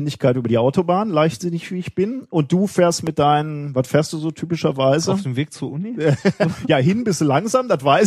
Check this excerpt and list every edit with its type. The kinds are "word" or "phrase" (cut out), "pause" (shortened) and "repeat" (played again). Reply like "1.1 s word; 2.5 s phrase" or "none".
none